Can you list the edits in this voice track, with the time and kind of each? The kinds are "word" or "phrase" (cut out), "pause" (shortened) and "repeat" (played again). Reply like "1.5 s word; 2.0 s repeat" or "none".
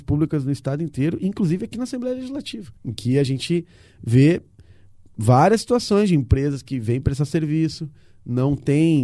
2.8 s pause